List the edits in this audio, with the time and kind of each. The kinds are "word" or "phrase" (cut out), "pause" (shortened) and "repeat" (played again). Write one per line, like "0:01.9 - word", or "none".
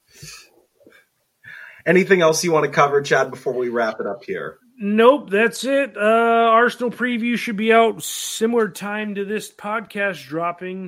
none